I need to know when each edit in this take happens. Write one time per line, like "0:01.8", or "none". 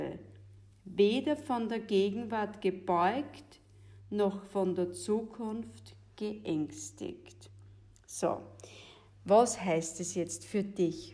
none